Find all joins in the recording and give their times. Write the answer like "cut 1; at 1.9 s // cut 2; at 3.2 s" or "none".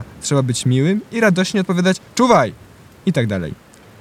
none